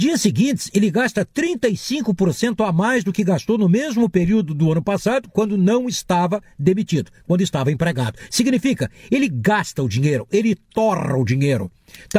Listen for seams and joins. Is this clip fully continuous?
yes; 0 cuts

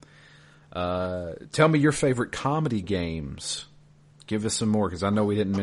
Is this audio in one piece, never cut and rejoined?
yes; 0 cuts

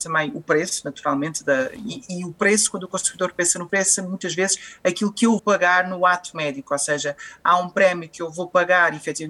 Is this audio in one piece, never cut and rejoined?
no; 2 cuts; at 3.7 s, 5.4 s

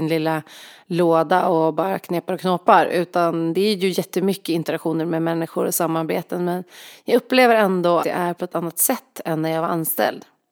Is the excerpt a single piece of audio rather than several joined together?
no; 1 cut; at 8.0 s

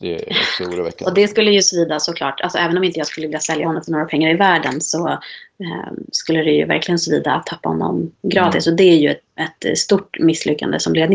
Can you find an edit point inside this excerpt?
no; 0 cuts

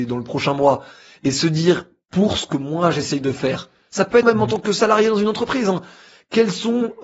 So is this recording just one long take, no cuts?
no; 1 cut; at 4.2 s

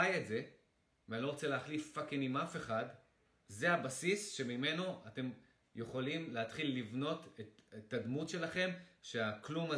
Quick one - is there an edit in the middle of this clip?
no; 0 cuts

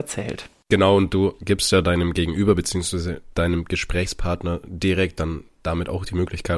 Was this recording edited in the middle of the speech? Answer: no; 0 cuts

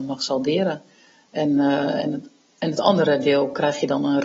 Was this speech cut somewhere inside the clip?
no; 0 cuts

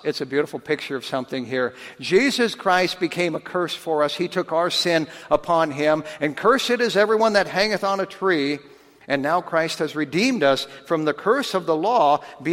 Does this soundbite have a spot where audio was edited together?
no; 0 cuts

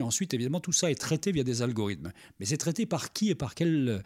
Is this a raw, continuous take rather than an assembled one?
yes; 0 cuts

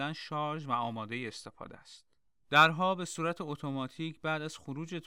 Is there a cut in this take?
no; 0 cuts

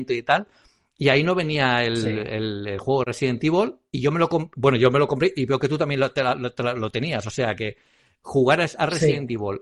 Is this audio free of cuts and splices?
yes; 0 cuts

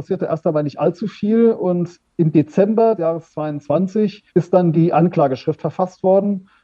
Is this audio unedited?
no; 2 cuts; at 3.0 s, 4.3 s

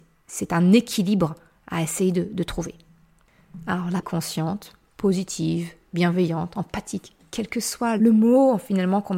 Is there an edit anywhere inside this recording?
yes; 1 cut; at 4.0 s

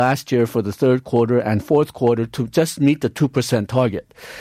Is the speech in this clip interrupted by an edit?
no; 0 cuts

